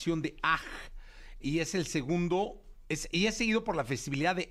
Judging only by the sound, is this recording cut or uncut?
cut